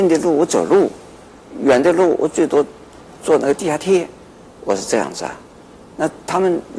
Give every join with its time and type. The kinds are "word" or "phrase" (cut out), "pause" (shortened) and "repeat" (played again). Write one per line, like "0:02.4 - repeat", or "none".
none